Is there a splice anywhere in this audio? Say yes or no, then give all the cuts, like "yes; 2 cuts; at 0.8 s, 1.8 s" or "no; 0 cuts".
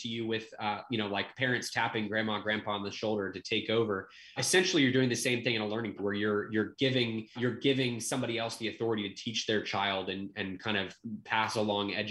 yes; 3 cuts; at 4.4 s, 6.0 s, 7.4 s